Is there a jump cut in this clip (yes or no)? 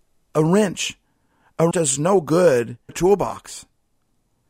yes